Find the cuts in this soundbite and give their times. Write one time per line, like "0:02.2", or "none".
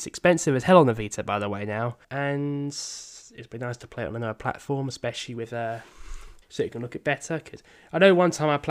0:02.0
0:06.4